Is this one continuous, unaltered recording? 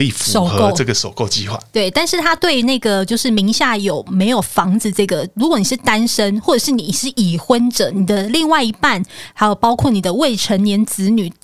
yes; 0 cuts

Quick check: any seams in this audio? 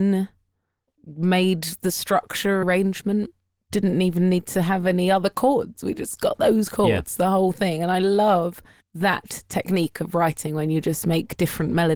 yes; 2 cuts; at 2.6 s, 8.8 s

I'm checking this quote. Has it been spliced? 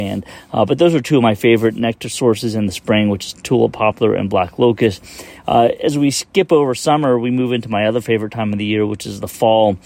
no; 0 cuts

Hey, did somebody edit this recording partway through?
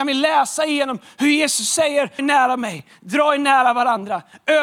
yes; 1 cut; at 2.2 s

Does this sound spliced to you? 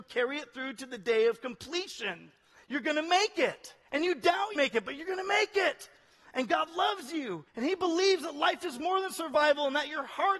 yes; 3 cuts; at 3.8 s, 4.6 s, 7.5 s

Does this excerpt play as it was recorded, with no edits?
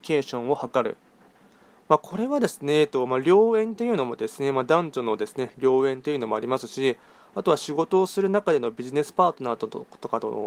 yes; 0 cuts

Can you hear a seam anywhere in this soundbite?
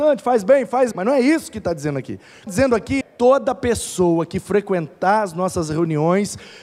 yes; 3 cuts; at 0.9 s, 2.5 s, 3.0 s

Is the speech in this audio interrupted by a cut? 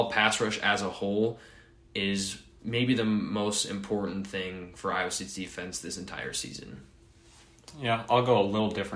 no; 0 cuts

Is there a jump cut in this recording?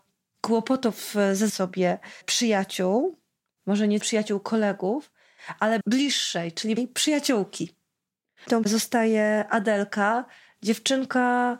yes; 6 cuts; at 1.5 s, 2.2 s, 4.0 s, 5.8 s, 6.8 s, 8.6 s

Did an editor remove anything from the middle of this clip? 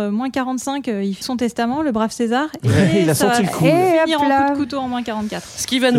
yes; 1 cut; at 1.2 s

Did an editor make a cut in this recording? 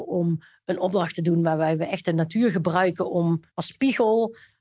yes; 1 cut; at 3.5 s

